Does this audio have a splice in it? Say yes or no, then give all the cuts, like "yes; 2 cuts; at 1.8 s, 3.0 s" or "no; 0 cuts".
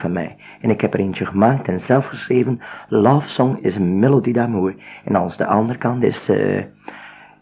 no; 0 cuts